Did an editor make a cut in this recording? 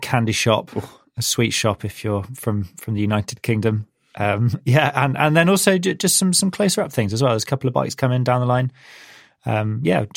no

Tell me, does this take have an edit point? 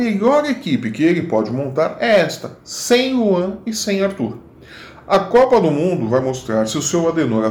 no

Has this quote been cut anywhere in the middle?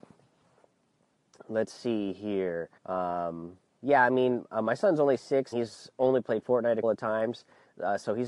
yes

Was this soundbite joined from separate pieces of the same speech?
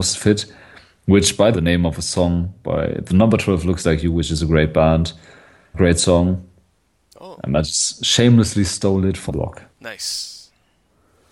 yes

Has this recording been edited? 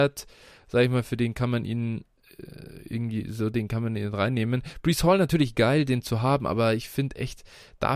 no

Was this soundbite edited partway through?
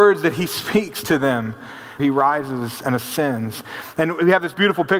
yes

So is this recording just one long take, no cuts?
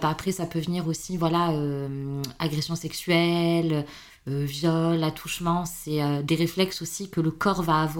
yes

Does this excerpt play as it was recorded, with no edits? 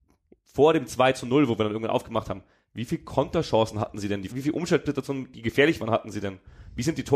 no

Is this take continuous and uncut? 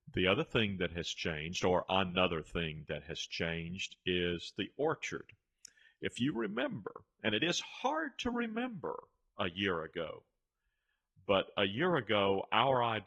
yes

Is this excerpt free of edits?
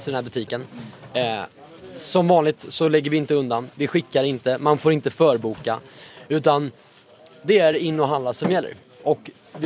yes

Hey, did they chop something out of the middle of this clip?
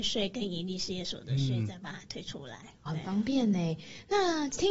yes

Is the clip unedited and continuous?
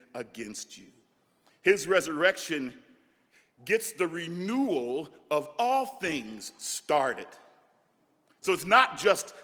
yes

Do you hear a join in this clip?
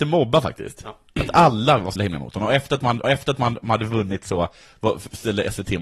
yes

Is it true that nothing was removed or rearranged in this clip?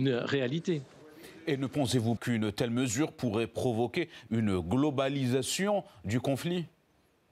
no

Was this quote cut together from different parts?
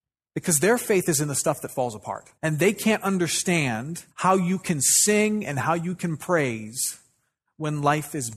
yes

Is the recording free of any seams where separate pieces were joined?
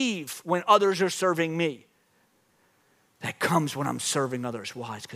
yes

